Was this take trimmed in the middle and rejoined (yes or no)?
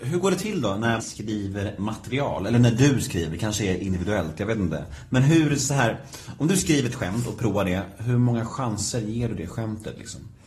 yes